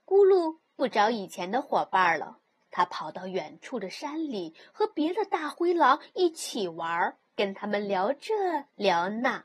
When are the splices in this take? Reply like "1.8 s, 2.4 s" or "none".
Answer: 2.5 s, 7.3 s